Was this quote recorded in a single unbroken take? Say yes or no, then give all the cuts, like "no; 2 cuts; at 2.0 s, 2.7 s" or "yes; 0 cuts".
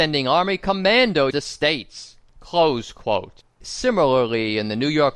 no; 2 cuts; at 1.3 s, 3.5 s